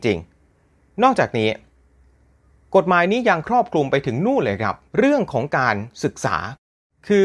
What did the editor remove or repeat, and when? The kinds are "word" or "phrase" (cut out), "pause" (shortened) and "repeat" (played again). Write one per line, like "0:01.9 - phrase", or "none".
0:04.9 - pause

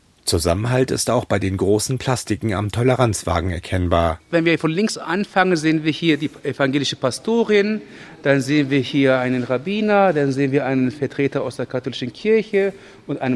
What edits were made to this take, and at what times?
none

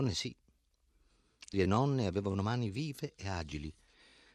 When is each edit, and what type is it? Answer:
0:01.5 - phrase

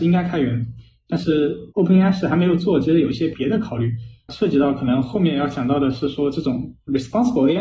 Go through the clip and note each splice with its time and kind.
0:01.7 - pause

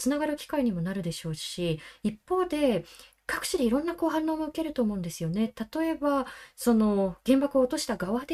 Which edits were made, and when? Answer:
none

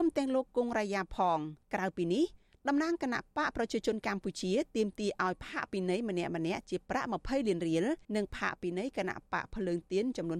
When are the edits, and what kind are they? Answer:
0:01.6 - pause
0:08.0 - pause

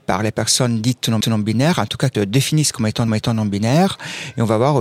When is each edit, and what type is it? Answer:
0:01.2 - repeat
0:02.1 - word
0:03.1 - repeat

